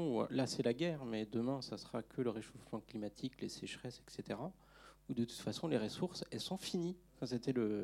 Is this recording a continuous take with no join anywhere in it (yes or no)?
yes